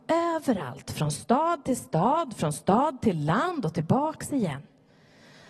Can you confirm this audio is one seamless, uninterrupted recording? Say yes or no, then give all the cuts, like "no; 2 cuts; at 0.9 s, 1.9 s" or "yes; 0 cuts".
yes; 0 cuts